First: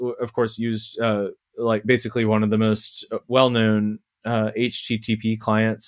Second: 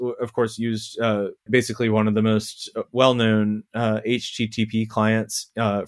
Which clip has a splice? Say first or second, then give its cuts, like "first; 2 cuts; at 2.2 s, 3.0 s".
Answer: second; 2 cuts; at 1.5 s, 3.7 s